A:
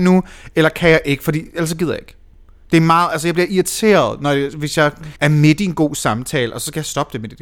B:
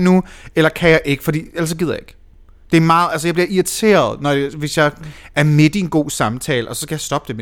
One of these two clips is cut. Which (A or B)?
A